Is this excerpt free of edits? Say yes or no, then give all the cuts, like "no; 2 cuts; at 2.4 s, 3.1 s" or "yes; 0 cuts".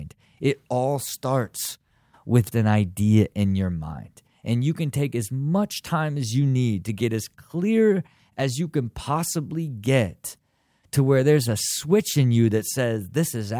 no; 1 cut; at 2.5 s